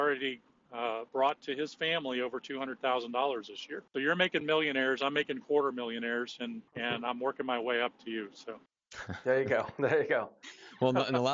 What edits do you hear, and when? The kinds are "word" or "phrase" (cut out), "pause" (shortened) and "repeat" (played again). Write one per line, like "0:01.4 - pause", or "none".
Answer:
0:01.1 - pause
0:03.9 - pause
0:06.7 - pause
0:08.7 - pause